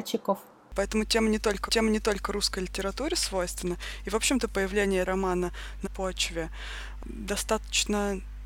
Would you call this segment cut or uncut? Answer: cut